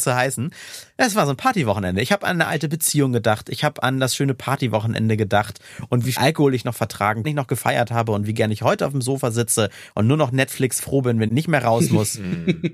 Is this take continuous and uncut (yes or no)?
no